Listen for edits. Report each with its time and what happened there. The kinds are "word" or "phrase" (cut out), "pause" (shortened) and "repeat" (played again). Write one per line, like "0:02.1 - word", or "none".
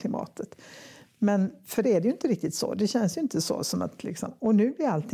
0:01.8 - word